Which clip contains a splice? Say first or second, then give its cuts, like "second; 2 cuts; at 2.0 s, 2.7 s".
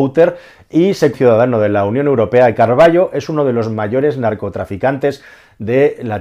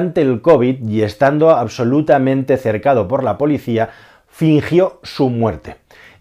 first; 1 cut; at 1.1 s